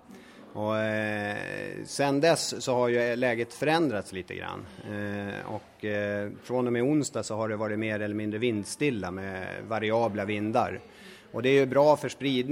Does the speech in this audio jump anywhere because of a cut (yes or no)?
no